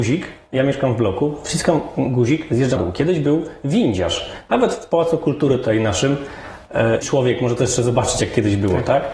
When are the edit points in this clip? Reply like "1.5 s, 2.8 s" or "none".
2.8 s, 7.0 s